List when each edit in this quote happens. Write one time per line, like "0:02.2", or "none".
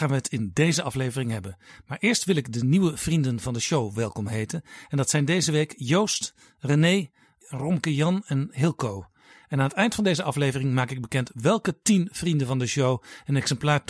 none